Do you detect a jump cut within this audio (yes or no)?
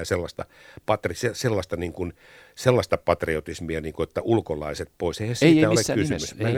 no